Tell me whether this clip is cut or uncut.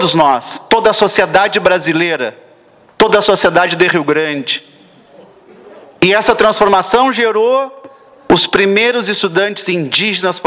uncut